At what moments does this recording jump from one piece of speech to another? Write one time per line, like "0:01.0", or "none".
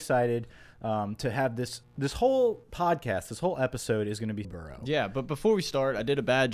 0:01.8
0:04.4